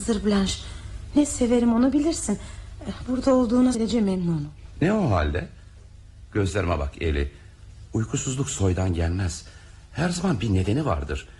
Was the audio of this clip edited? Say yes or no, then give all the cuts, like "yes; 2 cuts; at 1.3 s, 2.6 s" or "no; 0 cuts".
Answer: yes; 1 cut; at 3.7 s